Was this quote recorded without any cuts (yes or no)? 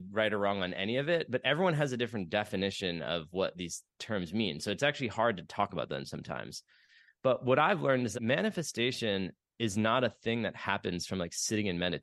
no